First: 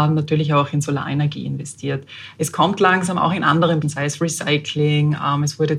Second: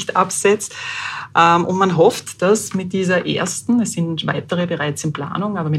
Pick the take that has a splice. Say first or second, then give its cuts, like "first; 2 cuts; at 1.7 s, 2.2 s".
first; 1 cut; at 3.8 s